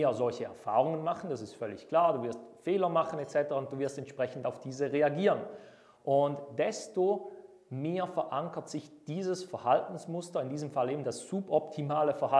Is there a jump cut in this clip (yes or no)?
no